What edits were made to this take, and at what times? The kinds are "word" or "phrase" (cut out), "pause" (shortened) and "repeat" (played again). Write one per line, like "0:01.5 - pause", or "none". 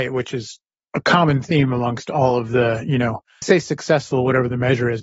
0:03.4 - word